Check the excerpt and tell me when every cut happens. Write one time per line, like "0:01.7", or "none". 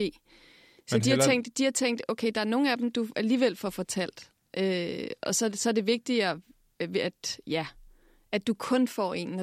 none

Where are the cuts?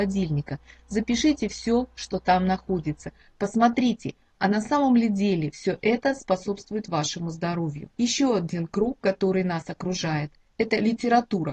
none

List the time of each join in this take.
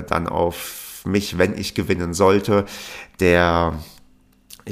none

